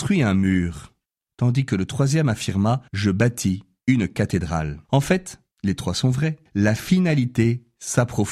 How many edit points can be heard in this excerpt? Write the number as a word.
four